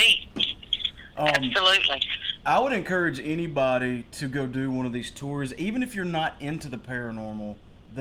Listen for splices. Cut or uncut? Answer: uncut